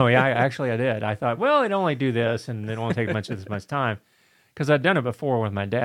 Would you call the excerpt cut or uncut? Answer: uncut